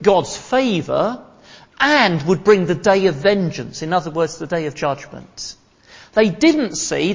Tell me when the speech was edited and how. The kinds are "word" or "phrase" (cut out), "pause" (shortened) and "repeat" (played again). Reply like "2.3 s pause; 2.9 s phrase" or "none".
none

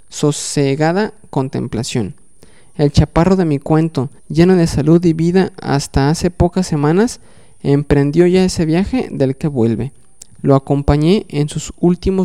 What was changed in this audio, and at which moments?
4.2 s pause; 9.4 s phrase

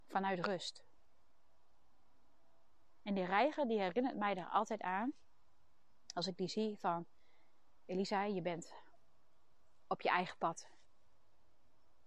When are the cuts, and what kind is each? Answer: none

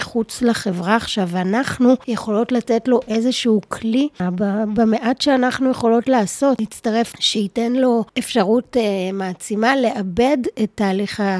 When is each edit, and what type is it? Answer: 7.1 s phrase; 8.1 s pause

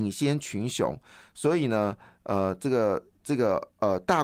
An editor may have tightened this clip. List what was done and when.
none

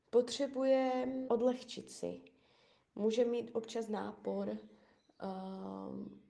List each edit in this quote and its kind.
1.3 s word

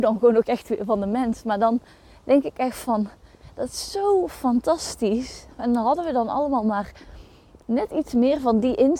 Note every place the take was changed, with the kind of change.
none

